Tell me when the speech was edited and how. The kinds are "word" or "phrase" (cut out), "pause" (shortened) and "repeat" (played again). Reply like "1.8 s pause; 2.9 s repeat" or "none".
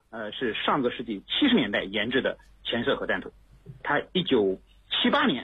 3.8 s word